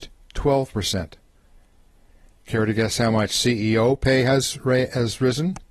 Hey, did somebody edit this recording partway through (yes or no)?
no